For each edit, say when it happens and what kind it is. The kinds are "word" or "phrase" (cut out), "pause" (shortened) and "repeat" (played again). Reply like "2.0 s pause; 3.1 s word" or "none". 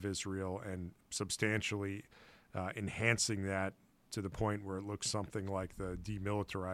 none